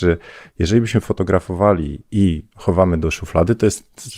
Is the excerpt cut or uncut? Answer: uncut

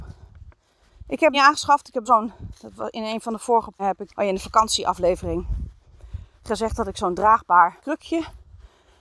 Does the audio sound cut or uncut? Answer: cut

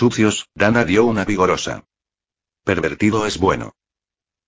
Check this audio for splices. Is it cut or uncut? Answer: cut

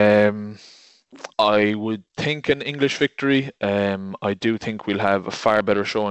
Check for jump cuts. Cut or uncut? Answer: cut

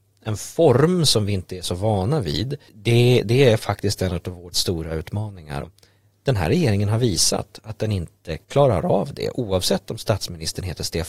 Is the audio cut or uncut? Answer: cut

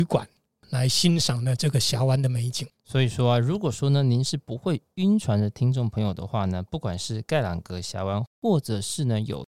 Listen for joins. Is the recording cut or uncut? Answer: cut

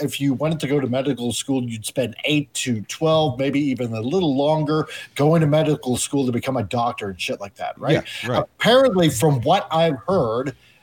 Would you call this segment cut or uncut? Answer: uncut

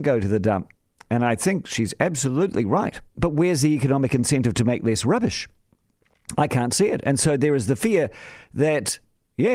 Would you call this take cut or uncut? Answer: cut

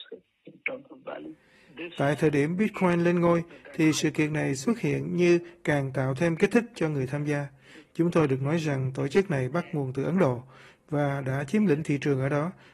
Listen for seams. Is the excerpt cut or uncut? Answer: uncut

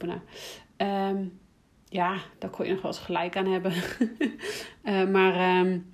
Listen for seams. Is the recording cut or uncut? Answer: uncut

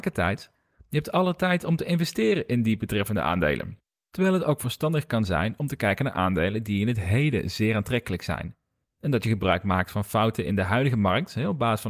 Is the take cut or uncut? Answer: uncut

